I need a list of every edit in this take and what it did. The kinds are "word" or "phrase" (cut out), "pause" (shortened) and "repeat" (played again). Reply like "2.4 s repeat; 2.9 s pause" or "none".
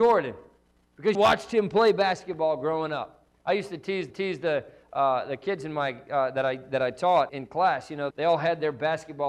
1.1 s word; 4.1 s repeat; 7.3 s word; 8.1 s word